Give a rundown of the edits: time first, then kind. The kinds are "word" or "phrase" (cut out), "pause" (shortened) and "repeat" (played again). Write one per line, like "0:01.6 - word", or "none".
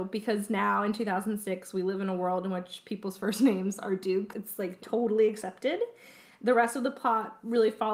0:04.3 - word